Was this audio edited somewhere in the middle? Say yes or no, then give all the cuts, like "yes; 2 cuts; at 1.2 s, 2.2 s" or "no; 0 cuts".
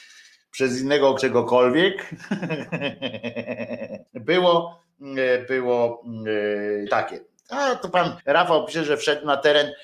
yes; 4 cuts; at 1.2 s, 4.1 s, 6.9 s, 8.2 s